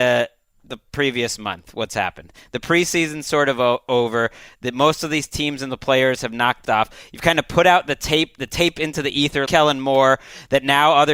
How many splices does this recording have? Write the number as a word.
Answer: two